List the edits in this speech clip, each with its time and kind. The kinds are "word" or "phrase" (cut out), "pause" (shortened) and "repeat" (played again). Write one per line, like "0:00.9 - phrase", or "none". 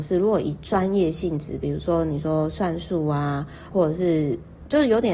0:03.7 - phrase